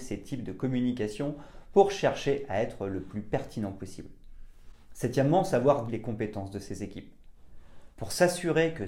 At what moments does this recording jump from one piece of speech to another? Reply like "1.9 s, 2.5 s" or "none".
5.9 s